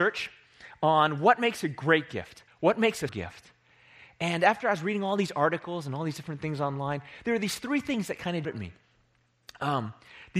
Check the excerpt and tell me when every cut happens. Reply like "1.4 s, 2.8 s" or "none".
2.5 s, 3.1 s, 8.4 s